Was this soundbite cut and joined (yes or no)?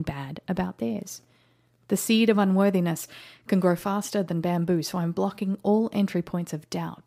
no